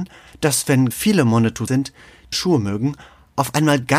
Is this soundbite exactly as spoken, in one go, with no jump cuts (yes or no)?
no